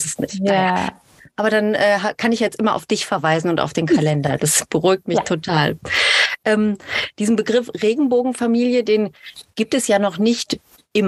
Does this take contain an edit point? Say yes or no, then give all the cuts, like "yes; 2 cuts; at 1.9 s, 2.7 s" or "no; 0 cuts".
no; 0 cuts